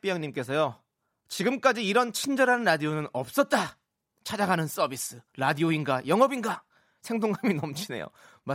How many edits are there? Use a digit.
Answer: 0